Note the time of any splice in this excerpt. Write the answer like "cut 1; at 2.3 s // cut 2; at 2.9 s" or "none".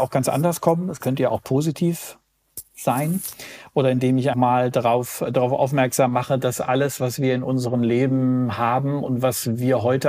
cut 1; at 4.3 s